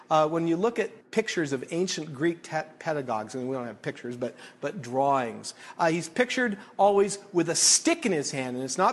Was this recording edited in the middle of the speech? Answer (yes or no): yes